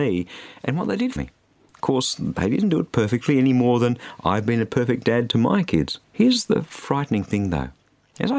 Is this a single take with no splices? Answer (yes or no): no